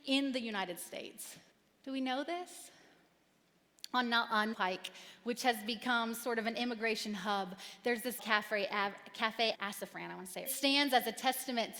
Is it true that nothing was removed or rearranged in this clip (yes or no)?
no